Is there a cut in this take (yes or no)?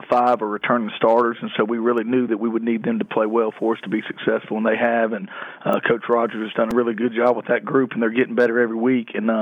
no